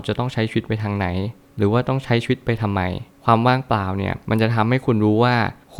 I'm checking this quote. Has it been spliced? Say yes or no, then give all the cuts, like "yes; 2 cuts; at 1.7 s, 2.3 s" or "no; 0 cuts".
no; 0 cuts